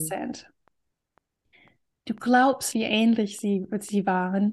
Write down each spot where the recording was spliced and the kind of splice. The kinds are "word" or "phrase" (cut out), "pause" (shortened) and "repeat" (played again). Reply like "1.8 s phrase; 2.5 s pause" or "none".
2.7 s word